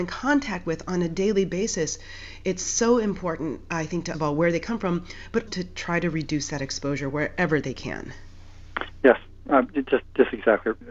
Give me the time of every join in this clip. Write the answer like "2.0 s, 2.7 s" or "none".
4.1 s, 5.5 s